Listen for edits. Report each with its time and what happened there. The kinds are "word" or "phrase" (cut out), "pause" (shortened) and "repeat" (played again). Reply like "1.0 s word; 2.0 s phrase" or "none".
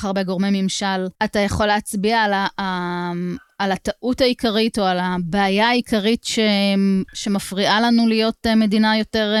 1.1 s pause; 7.1 s pause